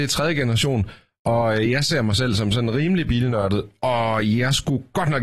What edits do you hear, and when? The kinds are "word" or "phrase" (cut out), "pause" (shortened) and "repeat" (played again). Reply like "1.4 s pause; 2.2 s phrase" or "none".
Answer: none